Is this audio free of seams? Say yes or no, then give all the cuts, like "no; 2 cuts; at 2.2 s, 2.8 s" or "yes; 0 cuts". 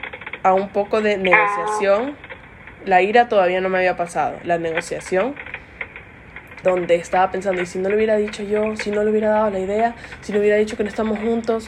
no; 1 cut; at 6.6 s